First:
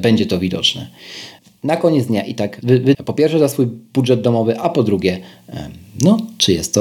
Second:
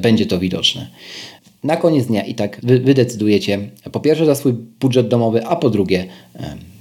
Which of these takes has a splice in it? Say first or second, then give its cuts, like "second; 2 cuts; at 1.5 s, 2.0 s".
first; 1 cut; at 2.9 s